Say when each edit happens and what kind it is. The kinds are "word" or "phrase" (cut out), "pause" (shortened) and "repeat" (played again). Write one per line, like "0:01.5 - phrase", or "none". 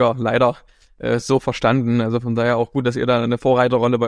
none